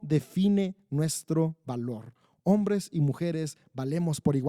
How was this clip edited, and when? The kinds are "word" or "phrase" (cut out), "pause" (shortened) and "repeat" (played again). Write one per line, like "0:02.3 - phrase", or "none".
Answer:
none